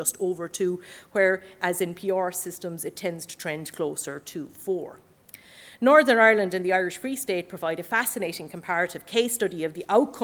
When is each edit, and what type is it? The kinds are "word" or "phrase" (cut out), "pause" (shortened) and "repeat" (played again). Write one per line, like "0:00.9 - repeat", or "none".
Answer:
none